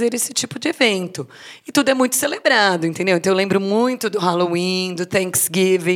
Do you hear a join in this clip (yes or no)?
no